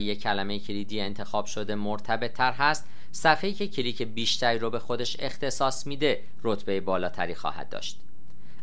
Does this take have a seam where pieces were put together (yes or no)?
no